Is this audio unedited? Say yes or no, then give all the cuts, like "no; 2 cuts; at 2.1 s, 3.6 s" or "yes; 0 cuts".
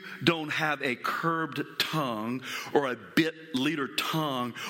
yes; 0 cuts